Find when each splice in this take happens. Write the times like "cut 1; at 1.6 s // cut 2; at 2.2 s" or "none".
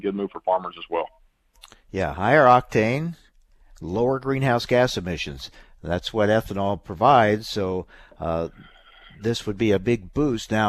none